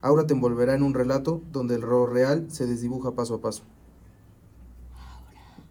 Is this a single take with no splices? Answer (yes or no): yes